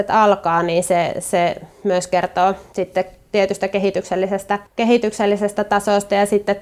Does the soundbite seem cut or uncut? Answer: cut